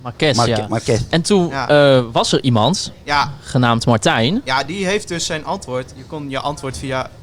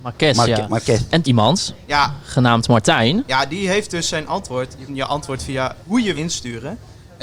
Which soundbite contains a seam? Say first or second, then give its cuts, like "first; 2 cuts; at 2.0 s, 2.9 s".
second; 4 cuts; at 1.2 s, 4.9 s, 5.8 s, 6.1 s